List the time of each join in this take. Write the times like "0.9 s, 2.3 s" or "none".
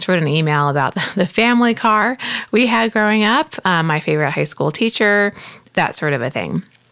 none